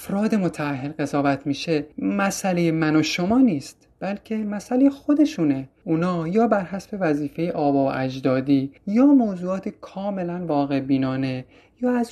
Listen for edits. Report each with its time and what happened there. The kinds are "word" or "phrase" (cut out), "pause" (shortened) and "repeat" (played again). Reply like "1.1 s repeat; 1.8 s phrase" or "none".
1.9 s pause; 8.8 s pause